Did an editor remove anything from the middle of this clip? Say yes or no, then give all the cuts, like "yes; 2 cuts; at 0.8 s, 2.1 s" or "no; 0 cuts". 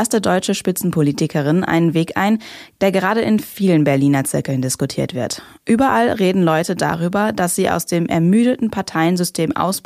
no; 0 cuts